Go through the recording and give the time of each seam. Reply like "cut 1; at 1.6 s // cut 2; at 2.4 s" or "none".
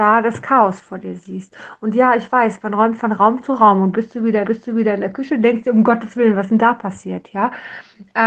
cut 1; at 4.4 s